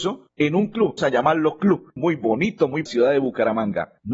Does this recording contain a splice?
yes; 3 cuts; at 1.0 s, 2.0 s, 2.9 s

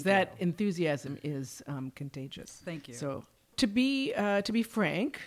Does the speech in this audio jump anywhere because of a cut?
no; 0 cuts

